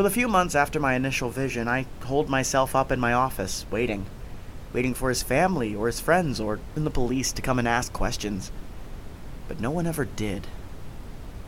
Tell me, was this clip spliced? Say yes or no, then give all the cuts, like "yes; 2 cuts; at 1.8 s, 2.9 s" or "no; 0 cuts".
yes; 1 cut; at 6.8 s